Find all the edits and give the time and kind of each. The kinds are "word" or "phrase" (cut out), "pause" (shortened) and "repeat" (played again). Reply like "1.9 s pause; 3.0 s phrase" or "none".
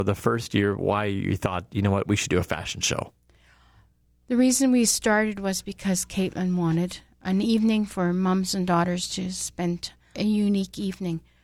10.1 s word

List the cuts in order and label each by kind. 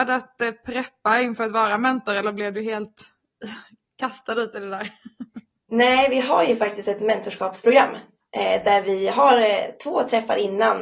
none

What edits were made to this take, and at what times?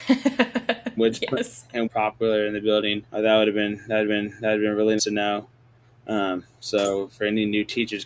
1.0 s word; 1.9 s phrase; 3.1 s pause; 4.1 s repeat; 5.0 s word; 5.7 s pause

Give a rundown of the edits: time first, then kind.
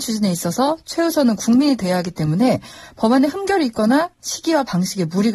none

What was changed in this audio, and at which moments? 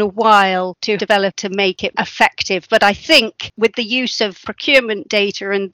1.0 s phrase; 1.9 s word

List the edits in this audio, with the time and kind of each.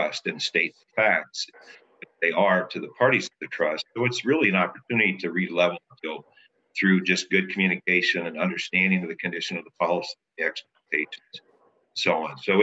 6.0 s word

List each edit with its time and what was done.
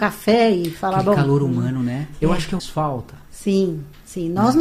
2.6 s phrase

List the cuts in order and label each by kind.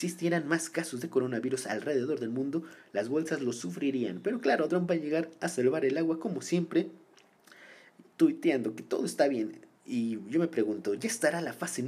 4.7 s word

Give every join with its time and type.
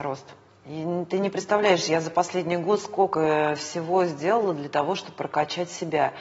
none

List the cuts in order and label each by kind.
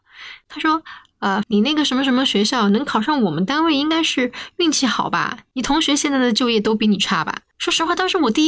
1.4 s phrase; 7.5 s pause

